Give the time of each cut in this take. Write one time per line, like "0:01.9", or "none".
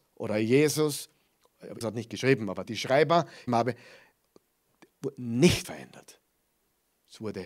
0:01.8
0:02.6
0:03.5
0:05.6